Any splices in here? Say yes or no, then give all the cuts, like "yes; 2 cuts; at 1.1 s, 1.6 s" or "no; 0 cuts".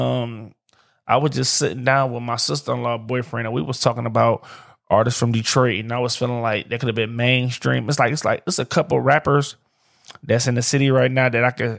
no; 0 cuts